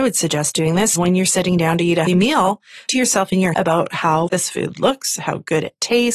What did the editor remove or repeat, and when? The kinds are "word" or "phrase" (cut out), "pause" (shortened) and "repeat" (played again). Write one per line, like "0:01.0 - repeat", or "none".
0:01.0 - word
0:02.1 - word
0:02.9 - word
0:03.5 - word
0:04.3 - word